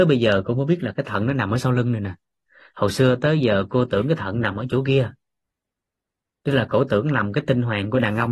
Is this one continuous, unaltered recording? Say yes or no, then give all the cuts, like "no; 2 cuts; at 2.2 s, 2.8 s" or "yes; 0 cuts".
yes; 0 cuts